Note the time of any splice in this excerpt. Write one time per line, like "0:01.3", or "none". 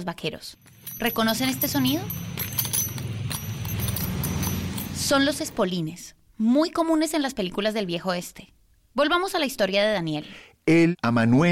none